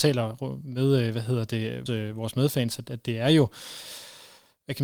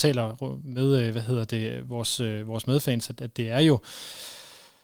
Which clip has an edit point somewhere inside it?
first; 1 cut; at 1.9 s

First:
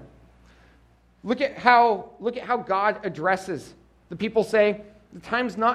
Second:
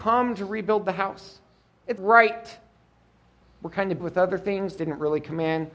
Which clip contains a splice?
second; 4 cuts; at 2.0 s, 3.4 s, 4.0 s, 4.8 s

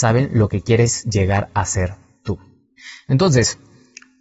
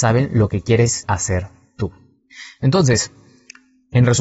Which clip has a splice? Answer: second; 1 cut; at 1.0 s

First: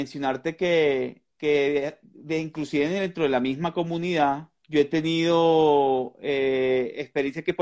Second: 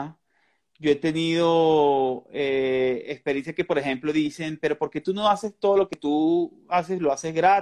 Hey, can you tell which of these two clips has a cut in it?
first; 2 cuts; at 1.3 s, 4.6 s

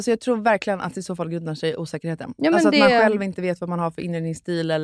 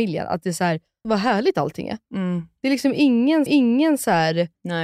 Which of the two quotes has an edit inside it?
second; 2 cuts; at 1.0 s, 3.5 s

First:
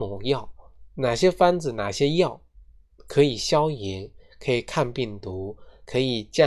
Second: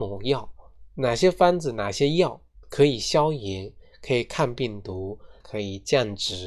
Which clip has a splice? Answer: second; 2 cuts; at 2.6 s, 5.4 s

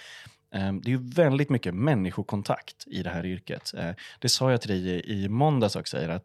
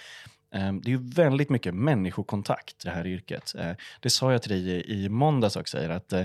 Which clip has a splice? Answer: second; 1 cut; at 2.8 s

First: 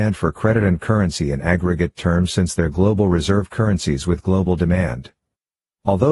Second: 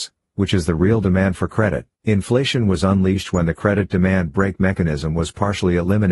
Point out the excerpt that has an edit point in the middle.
second; 1 cut; at 1.9 s

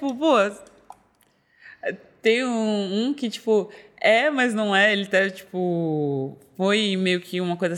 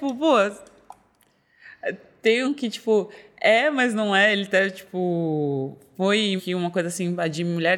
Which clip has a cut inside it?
second; 2 cuts; at 2.4 s, 6.4 s

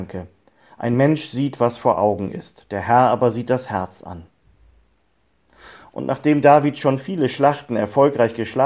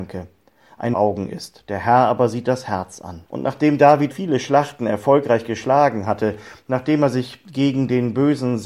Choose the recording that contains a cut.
second; 3 cuts; at 0.9 s, 3.3 s, 4.1 s

